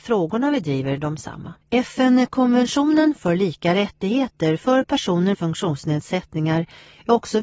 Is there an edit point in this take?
yes; 2 cuts; at 1.6 s, 5.3 s

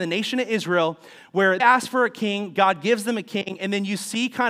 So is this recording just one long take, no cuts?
no; 1 cut; at 1.6 s

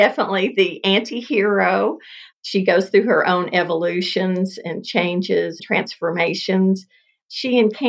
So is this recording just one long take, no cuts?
no; 2 cuts; at 2.3 s, 5.6 s

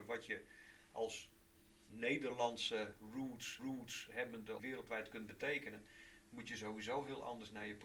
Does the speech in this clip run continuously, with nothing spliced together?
no; 2 cuts; at 3.6 s, 4.6 s

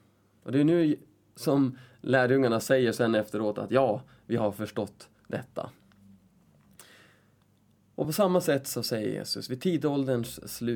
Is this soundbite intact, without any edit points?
yes; 0 cuts

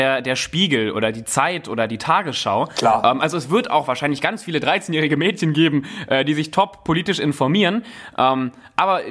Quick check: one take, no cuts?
yes; 0 cuts

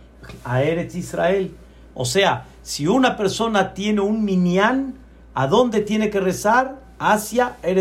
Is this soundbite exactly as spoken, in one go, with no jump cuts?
yes; 0 cuts

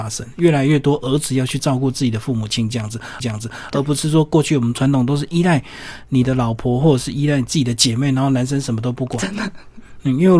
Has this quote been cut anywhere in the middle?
yes; 1 cut; at 3.2 s

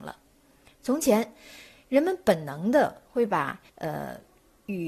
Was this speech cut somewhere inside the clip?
yes; 1 cut; at 3.7 s

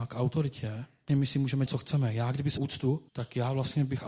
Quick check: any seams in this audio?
yes; 4 cuts; at 1.1 s, 1.7 s, 2.6 s, 3.1 s

